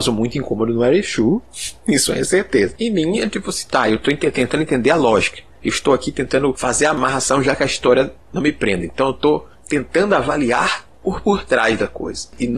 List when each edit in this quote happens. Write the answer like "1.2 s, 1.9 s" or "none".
none